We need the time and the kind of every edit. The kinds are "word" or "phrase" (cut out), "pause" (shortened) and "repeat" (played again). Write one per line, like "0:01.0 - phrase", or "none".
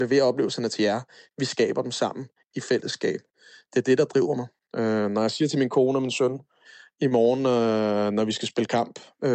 none